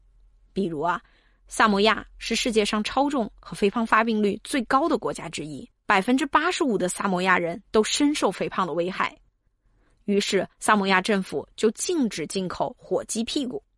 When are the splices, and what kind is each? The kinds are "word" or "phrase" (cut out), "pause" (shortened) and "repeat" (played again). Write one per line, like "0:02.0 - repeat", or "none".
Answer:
0:05.8 - pause
0:10.5 - pause

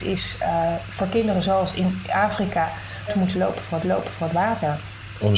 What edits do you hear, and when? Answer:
0:03.1 - phrase
0:03.8 - repeat

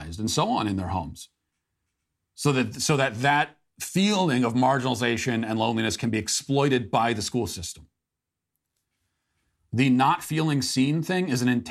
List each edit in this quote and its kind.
none

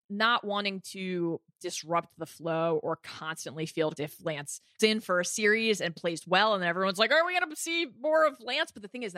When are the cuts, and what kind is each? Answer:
0:04.0 - word
0:04.8 - word

